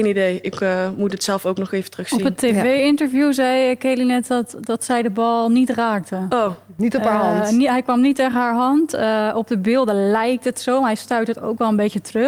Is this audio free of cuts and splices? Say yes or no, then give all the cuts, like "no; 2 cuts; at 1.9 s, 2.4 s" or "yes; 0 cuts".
yes; 0 cuts